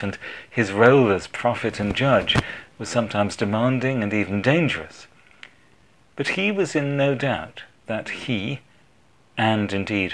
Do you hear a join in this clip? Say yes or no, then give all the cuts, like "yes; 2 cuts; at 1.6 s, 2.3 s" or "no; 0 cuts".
no; 0 cuts